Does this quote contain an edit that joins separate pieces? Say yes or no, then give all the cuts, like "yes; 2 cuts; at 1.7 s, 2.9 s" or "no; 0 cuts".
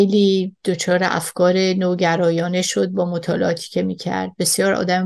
no; 0 cuts